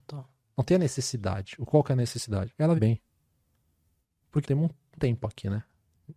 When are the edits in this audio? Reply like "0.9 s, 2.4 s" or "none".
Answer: 2.8 s, 4.4 s, 4.9 s

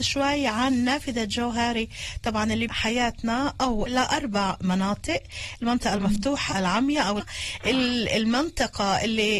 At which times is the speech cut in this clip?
2.7 s, 3.9 s, 6.5 s, 7.2 s

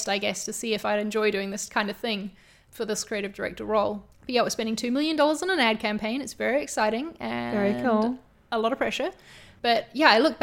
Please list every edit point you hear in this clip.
4.1 s

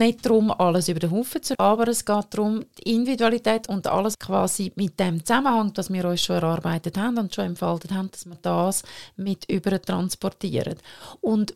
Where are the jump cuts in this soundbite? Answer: 1.5 s, 3.7 s, 4.1 s

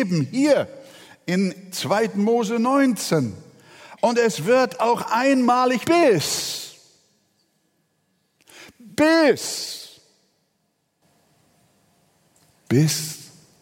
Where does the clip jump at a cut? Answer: 5.8 s

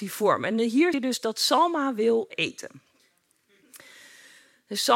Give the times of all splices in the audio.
0.9 s, 2.3 s

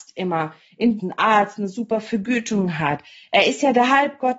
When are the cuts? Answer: 1.0 s

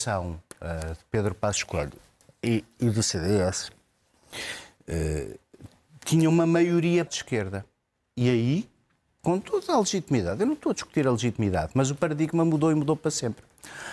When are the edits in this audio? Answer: 7.1 s

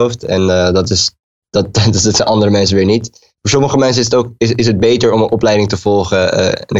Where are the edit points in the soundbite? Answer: 1.4 s, 3.3 s, 4.5 s

